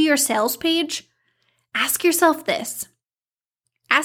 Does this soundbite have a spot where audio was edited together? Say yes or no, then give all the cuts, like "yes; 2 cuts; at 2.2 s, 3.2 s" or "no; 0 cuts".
no; 0 cuts